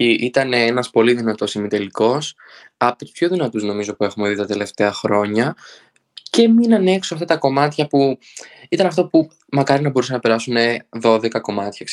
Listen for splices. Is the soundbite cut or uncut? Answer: uncut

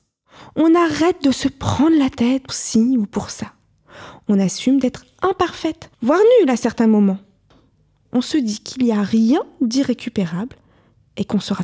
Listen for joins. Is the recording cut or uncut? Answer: cut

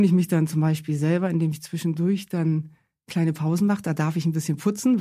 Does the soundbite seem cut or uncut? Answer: uncut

